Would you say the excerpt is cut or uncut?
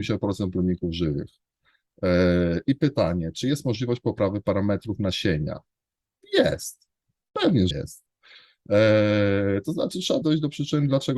cut